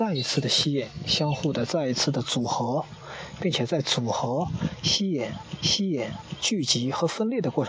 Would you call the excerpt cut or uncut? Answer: cut